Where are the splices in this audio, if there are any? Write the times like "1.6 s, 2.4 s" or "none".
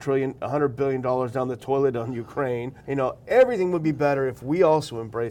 2.8 s